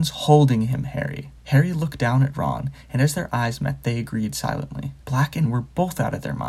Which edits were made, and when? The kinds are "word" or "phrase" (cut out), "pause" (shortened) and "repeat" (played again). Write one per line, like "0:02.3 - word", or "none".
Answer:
0:01.4 - pause
0:05.0 - pause
0:05.4 - word